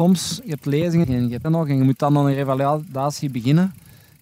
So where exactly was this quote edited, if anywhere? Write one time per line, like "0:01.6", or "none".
0:01.0
0:01.4

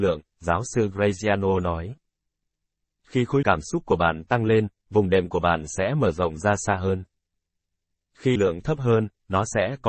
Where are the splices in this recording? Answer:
0:03.4
0:08.4

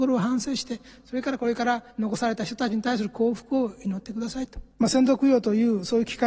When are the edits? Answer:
0:01.9
0:04.7

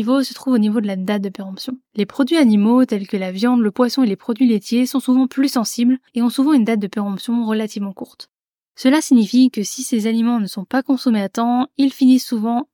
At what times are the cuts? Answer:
0:01.8
0:06.1

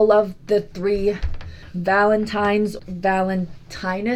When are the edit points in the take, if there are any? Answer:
0:02.8

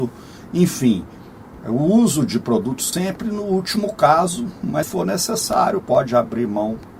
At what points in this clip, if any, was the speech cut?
0:02.9
0:04.8
0:05.8

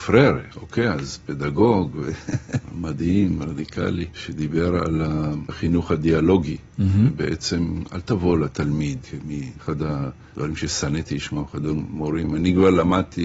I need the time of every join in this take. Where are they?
none

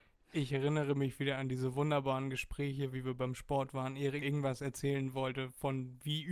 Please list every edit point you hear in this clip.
0:04.2

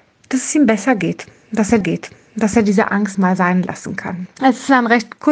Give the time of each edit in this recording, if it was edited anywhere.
0:01.8
0:03.1
0:04.3

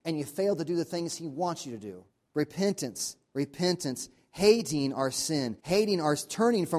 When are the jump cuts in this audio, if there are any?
0:02.1
0:05.6

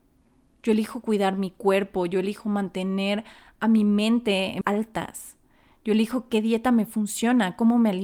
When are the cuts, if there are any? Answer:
0:04.6

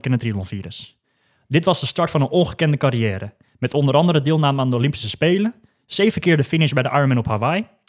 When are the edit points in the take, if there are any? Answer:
none

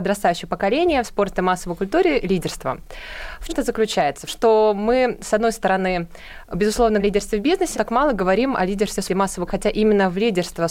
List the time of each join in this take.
0:01.0
0:02.2
0:03.5
0:04.3
0:07.0
0:07.7
0:09.1
0:09.5

